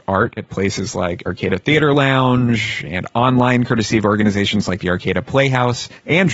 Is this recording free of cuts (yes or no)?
yes